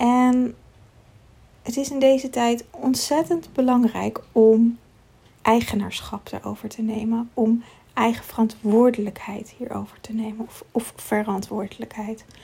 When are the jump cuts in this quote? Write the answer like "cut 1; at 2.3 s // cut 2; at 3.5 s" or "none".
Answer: none